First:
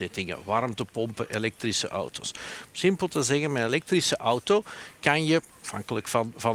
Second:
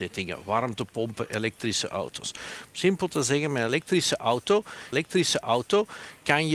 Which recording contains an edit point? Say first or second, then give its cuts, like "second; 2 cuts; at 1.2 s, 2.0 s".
second; 1 cut; at 4.9 s